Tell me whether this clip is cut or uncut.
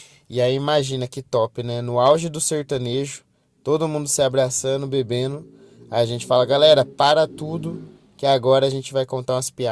uncut